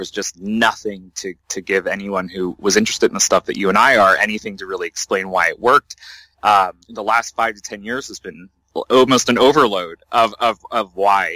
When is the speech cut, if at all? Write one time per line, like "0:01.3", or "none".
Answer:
0:06.8